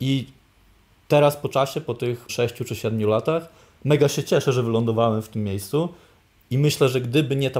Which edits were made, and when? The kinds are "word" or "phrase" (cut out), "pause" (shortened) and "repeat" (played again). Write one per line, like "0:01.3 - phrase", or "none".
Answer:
0:02.3 - word